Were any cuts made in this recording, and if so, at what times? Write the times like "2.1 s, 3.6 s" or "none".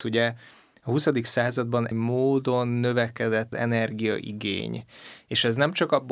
1.9 s, 3.5 s